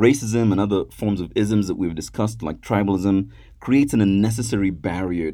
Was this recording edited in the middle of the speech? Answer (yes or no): no